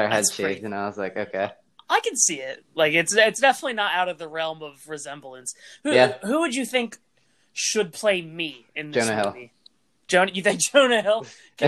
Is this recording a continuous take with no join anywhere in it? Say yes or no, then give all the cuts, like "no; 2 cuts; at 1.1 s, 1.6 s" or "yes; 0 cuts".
yes; 0 cuts